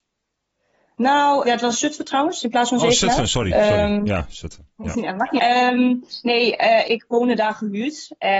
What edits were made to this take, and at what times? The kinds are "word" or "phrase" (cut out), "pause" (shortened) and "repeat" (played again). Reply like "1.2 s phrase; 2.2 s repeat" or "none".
1.4 s word; 5.4 s word; 6.8 s word